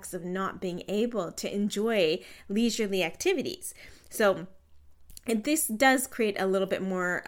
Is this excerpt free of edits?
yes; 0 cuts

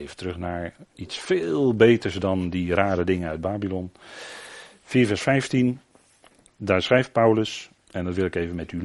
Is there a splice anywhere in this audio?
no; 0 cuts

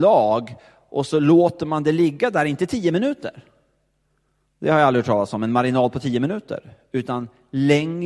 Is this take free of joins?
yes; 0 cuts

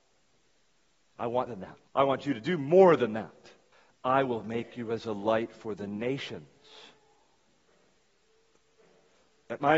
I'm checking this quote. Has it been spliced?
yes; 3 cuts; at 1.5 s, 1.9 s, 3.7 s

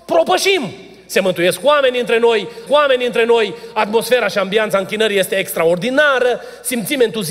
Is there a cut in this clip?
yes; 1 cut; at 2.7 s

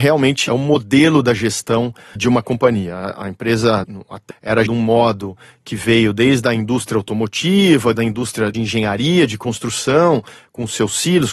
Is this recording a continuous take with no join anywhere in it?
no; 6 cuts; at 2.2 s, 3.8 s, 4.3 s, 4.7 s, 7.9 s, 8.5 s

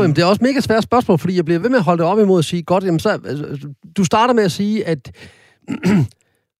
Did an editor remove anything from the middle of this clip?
no; 0 cuts

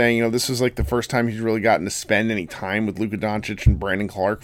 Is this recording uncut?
yes; 0 cuts

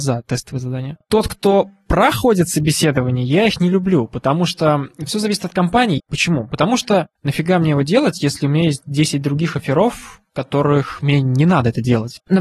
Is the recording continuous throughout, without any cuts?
yes; 0 cuts

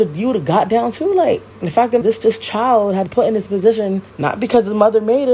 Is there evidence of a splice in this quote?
yes; 4 cuts; at 1.5 s, 2.0 s, 3.1 s, 4.1 s

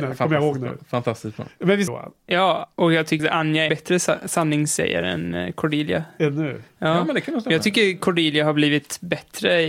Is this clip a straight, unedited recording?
no; 4 cuts; at 1.9 s, 2.7 s, 3.2 s, 3.7 s

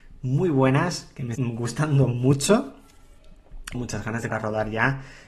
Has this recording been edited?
yes; 3 cuts; at 1.4 s, 3.7 s, 4.3 s

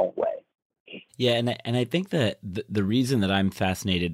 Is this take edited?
yes; 1 cut; at 1.1 s

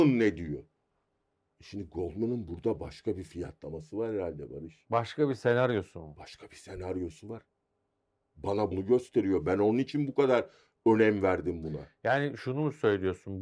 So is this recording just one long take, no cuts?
no; 1 cut; at 8.7 s

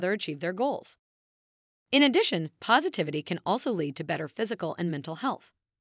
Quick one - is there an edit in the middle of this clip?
no; 0 cuts

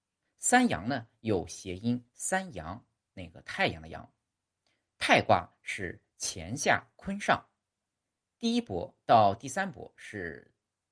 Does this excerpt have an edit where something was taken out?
no; 0 cuts

